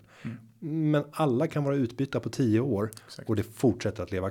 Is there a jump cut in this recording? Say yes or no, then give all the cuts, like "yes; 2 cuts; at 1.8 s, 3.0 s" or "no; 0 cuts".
no; 0 cuts